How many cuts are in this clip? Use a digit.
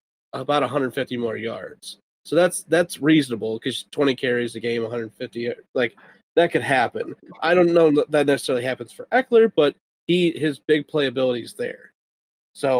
0